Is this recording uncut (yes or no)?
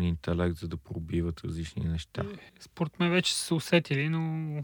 no